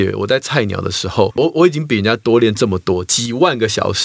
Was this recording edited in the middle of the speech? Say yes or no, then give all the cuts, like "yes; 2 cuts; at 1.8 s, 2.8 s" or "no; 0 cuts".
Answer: yes; 1 cut; at 1.3 s